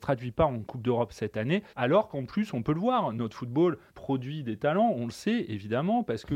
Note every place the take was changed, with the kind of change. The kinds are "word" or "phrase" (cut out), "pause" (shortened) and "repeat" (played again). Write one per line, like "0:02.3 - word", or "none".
0:01.7 - pause
0:03.9 - pause